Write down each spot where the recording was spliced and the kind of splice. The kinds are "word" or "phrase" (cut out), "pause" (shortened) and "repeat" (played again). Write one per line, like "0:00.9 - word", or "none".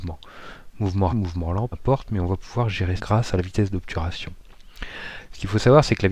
0:01.1 - word
0:01.7 - word
0:03.0 - word